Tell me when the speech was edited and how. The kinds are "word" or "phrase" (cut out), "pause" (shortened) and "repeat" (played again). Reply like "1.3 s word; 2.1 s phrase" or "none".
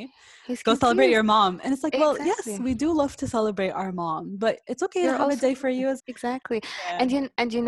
4.6 s pause; 6.0 s word